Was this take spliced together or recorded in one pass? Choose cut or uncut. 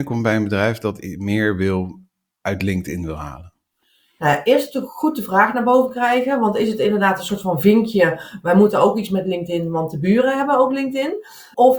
uncut